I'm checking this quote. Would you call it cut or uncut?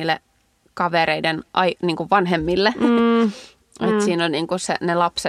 uncut